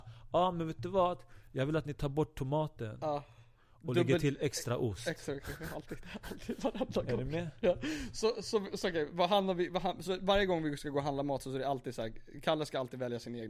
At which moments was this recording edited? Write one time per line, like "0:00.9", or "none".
none